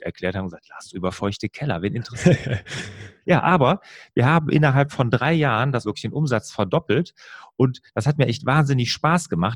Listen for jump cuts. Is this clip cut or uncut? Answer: cut